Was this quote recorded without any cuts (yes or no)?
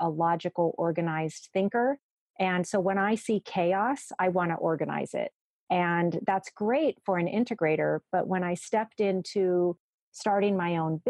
yes